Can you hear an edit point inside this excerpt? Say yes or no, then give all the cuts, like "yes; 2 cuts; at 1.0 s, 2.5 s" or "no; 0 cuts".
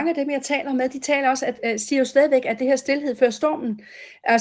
no; 0 cuts